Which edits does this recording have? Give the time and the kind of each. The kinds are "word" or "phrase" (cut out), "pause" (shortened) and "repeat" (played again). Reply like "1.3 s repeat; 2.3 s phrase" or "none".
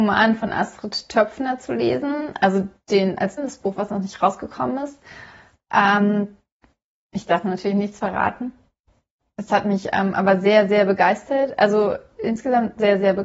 3.4 s word